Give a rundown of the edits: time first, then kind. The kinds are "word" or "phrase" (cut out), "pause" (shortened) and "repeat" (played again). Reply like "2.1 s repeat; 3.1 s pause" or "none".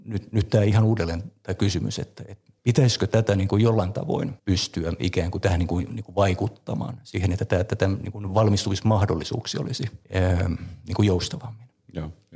2.6 s pause; 4.4 s pause; 10.0 s pause